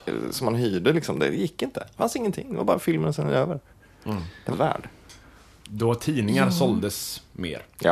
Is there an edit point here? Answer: yes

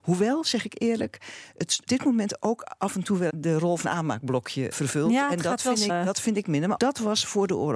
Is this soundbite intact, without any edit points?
no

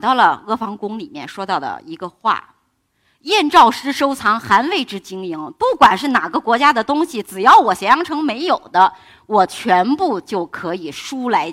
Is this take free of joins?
yes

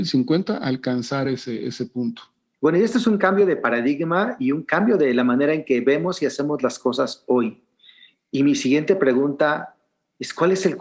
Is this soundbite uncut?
yes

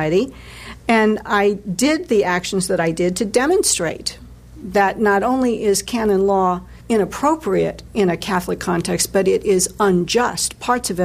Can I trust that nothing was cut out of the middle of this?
no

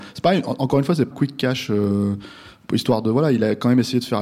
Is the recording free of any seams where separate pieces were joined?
no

